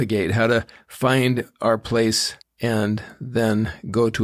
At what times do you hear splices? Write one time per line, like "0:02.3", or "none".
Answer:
0:02.4